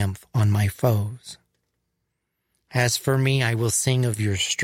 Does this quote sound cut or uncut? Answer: uncut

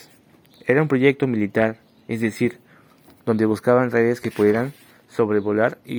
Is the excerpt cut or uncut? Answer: uncut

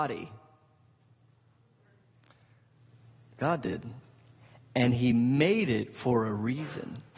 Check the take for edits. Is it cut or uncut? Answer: uncut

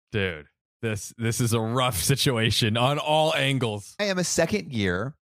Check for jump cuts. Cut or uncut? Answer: cut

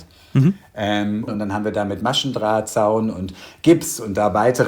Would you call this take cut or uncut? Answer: uncut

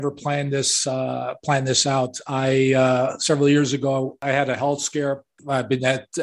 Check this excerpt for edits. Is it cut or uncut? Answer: uncut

